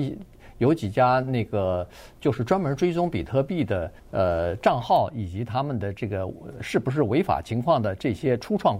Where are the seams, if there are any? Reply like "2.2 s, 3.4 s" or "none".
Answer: 4.0 s